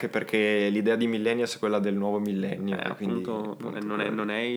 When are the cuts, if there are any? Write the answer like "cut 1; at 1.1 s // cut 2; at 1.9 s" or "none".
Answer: none